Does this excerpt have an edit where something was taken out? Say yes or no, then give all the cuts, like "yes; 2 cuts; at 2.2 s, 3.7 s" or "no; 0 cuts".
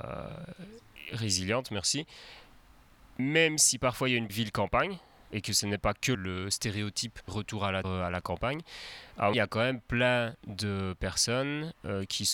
yes; 6 cuts; at 4.3 s, 5.3 s, 6.1 s, 7.3 s, 7.8 s, 9.3 s